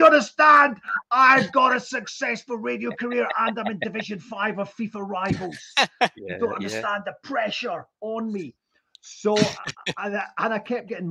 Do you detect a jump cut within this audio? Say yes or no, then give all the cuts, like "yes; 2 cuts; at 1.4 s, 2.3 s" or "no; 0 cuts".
no; 0 cuts